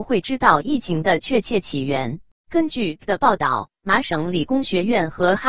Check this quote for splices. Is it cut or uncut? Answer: cut